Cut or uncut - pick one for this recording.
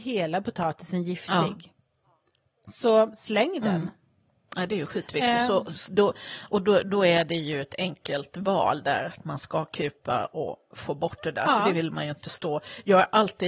uncut